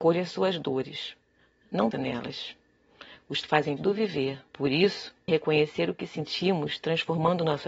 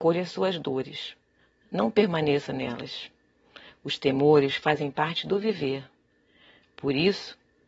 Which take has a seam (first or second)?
first